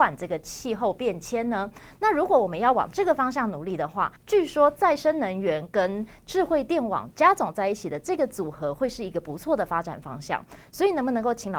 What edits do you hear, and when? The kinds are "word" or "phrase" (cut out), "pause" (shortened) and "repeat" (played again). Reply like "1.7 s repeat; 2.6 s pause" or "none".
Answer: 4.2 s pause